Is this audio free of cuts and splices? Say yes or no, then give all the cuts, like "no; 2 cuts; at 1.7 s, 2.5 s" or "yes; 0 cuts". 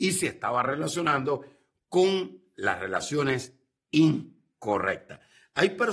yes; 0 cuts